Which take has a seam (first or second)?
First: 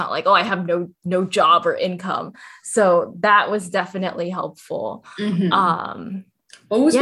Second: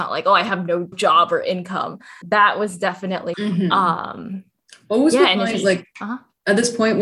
second